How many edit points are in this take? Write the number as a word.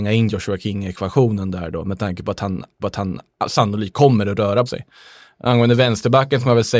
two